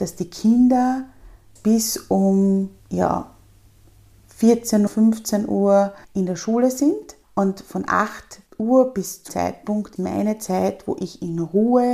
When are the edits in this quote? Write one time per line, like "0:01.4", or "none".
0:01.6
0:02.8
0:04.9
0:06.0
0:07.2
0:08.5
0:09.3
0:10.0

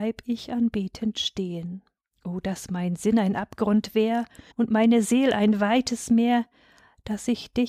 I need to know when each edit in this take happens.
0:02.0
0:04.5

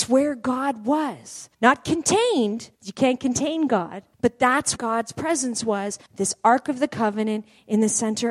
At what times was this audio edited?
0:01.5
0:02.7
0:04.1
0:04.8
0:06.1

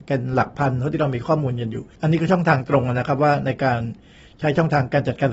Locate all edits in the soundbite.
0:01.9

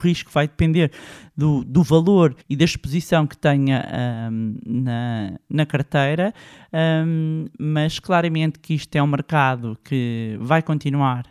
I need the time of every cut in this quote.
0:02.4

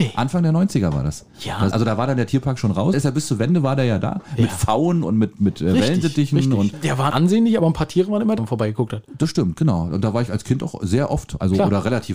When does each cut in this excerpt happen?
0:01.7
0:02.9
0:05.3
0:06.7
0:07.1
0:08.4

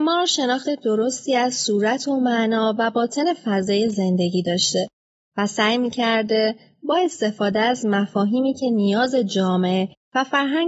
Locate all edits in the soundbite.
none

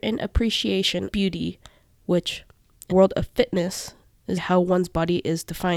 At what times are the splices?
0:01.1
0:02.9
0:04.4

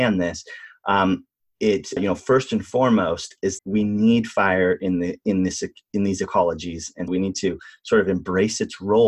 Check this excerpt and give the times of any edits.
0:02.0
0:03.6
0:07.1

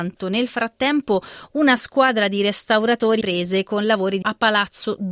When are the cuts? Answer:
0:03.2
0:04.2

